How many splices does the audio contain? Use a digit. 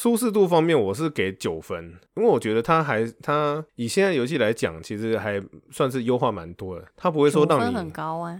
3